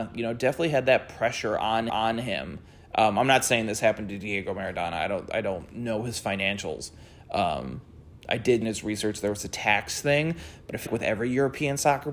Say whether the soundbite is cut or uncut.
cut